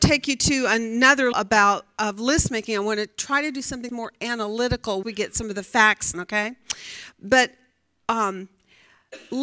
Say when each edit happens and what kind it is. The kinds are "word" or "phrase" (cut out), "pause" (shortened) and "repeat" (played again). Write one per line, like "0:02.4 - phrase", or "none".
0:01.3 - word
0:02.0 - word
0:03.9 - word
0:05.0 - word
0:06.1 - word